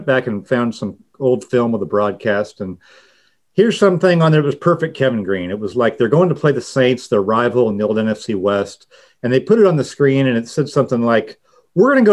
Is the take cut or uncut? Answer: uncut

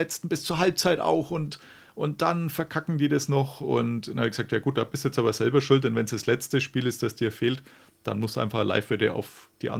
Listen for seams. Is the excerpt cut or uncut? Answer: uncut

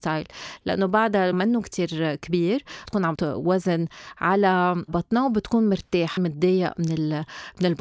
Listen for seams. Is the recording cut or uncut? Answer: cut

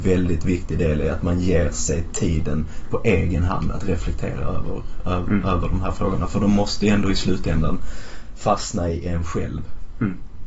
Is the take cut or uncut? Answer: uncut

